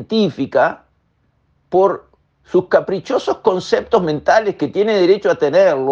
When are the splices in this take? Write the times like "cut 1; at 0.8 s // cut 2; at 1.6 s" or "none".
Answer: none